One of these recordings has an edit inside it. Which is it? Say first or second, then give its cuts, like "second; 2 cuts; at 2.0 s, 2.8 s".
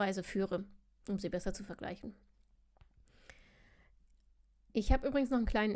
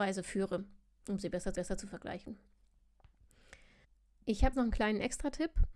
second; 3 cuts; at 1.5 s, 3.8 s, 4.5 s